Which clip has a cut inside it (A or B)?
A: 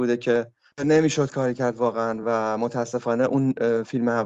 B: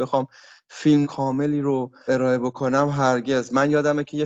B